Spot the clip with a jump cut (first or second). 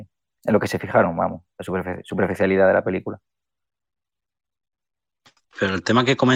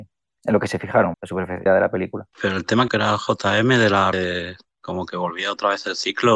second